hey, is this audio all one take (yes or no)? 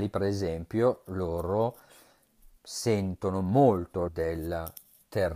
no